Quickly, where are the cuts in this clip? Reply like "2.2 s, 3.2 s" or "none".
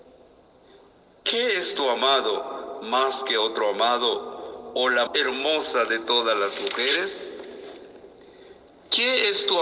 5.1 s